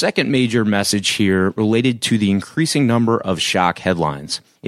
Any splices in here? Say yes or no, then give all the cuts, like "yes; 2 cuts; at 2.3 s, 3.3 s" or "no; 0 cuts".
no; 0 cuts